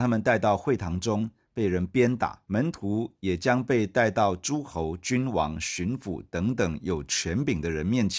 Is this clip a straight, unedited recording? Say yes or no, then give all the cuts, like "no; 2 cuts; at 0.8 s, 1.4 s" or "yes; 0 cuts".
no; 1 cut; at 2.4 s